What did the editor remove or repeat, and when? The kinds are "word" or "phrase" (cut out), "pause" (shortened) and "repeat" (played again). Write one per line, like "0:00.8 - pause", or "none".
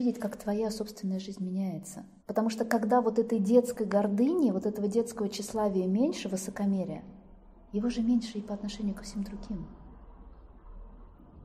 0:02.2 - pause